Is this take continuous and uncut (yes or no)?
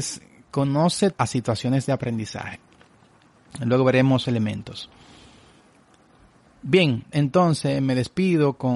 no